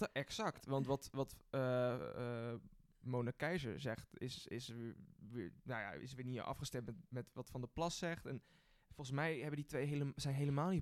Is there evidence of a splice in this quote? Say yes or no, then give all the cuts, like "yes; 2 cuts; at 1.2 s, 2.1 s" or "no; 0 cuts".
no; 0 cuts